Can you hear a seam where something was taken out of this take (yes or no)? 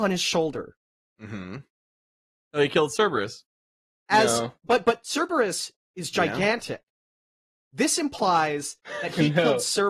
no